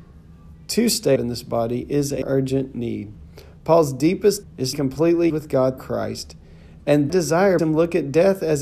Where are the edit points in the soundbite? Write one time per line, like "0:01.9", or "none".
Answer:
0:01.2
0:02.2
0:04.4
0:04.7
0:05.3
0:05.8
0:07.1
0:07.6